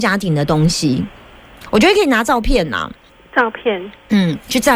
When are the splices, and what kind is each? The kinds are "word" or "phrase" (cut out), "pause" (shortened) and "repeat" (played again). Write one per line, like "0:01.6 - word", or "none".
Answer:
0:03.1 - pause